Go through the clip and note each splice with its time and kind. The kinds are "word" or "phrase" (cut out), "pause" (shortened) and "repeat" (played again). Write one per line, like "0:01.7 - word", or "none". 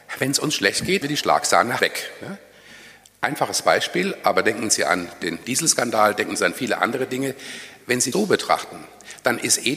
0:01.0 - word
0:01.8 - word
0:08.1 - word